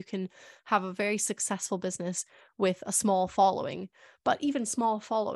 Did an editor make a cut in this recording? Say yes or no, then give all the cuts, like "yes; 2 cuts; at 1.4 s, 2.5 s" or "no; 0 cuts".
no; 0 cuts